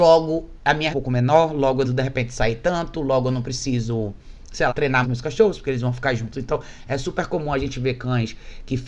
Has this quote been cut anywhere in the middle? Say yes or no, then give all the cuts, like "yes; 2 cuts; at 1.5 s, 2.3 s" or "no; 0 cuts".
yes; 4 cuts; at 0.9 s, 1.8 s, 4.7 s, 5.0 s